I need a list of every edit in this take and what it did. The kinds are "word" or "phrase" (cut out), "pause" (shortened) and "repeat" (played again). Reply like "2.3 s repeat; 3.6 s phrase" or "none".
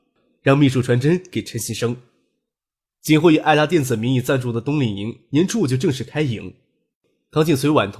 none